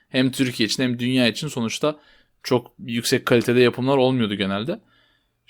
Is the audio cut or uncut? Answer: uncut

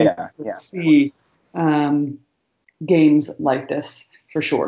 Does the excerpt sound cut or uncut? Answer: uncut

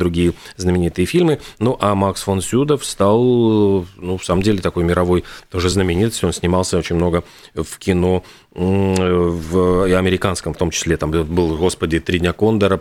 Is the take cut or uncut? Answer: uncut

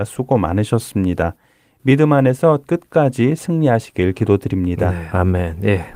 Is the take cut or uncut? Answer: uncut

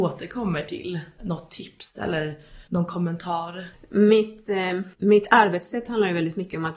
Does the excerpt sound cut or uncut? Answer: cut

